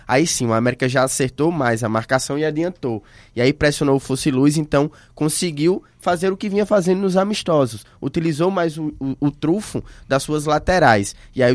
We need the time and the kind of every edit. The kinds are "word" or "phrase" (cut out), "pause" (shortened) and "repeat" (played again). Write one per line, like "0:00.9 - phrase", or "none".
none